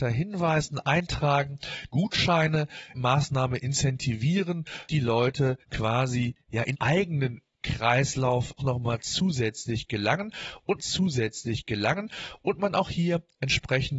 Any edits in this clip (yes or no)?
yes